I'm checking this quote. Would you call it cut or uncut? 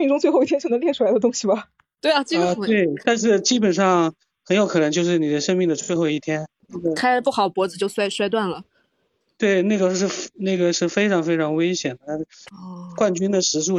uncut